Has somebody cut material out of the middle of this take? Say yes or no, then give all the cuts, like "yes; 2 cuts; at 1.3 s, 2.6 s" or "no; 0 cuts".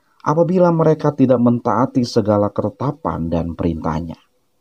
no; 0 cuts